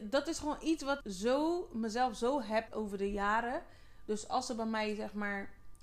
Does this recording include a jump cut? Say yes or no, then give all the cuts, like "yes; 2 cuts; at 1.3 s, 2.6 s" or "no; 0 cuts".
yes; 2 cuts; at 1.0 s, 2.7 s